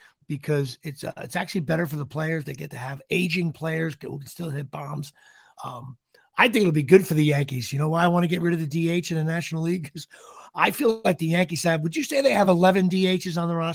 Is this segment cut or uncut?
uncut